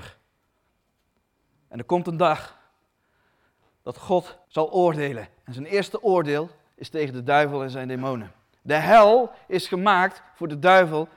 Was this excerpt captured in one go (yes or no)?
no